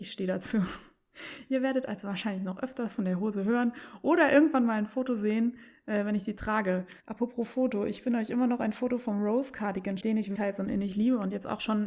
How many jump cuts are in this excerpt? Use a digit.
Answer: 3